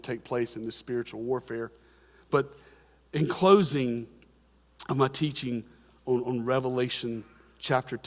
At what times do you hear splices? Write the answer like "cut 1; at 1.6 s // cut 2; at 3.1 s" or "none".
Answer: none